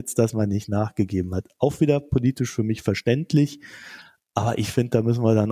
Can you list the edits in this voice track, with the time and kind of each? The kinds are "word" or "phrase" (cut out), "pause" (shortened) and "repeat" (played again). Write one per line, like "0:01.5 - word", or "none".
none